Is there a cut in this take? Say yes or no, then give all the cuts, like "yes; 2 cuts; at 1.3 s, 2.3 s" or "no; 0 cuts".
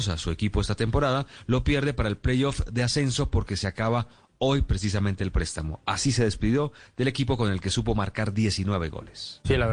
no; 0 cuts